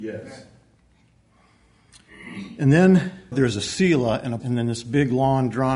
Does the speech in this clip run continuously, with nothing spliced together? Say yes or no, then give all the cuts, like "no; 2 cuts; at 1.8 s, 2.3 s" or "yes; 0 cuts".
no; 2 cuts; at 3.3 s, 4.4 s